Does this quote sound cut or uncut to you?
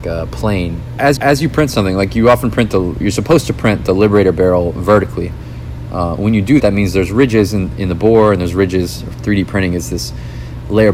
cut